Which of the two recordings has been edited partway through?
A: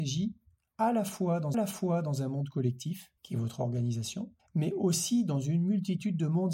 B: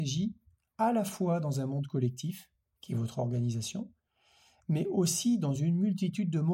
A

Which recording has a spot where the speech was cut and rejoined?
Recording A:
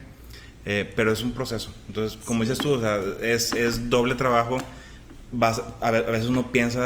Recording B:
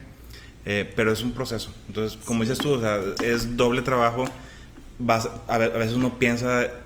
B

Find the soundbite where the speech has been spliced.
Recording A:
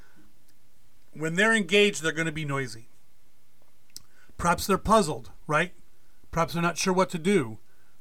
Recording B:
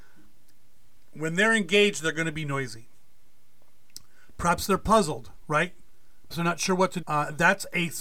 B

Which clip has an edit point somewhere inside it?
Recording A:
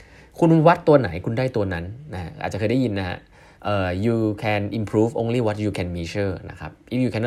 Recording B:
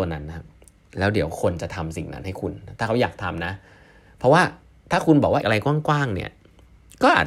B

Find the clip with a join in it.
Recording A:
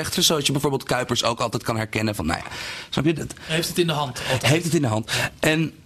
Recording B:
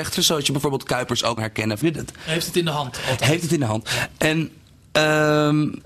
B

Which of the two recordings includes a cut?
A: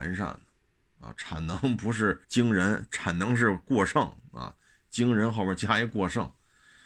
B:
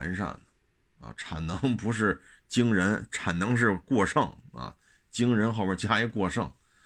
A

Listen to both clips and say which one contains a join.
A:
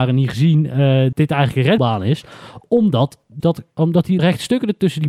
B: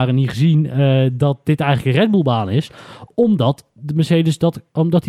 A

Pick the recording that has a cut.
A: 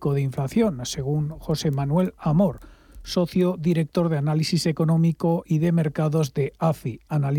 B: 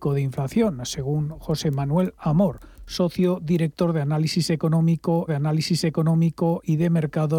B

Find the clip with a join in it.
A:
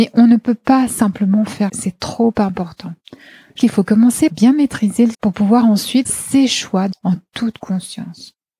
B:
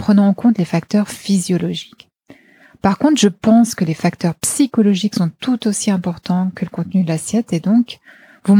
A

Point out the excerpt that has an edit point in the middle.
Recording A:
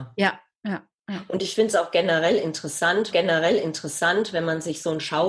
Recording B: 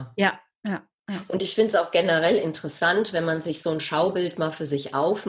A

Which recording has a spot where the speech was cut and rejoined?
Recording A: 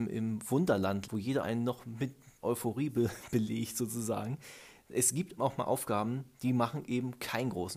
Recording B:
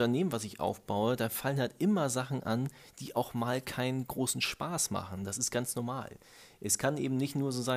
A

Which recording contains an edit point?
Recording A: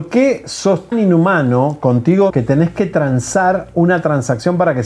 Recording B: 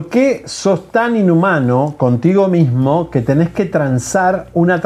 A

